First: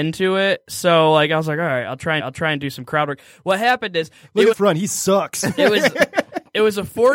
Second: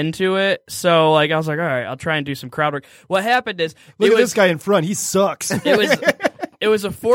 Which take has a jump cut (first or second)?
first